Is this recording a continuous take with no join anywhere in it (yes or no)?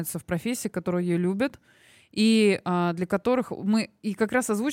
yes